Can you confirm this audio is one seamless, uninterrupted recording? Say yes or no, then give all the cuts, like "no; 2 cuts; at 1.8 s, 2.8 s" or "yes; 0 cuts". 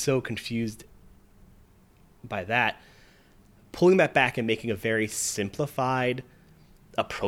yes; 0 cuts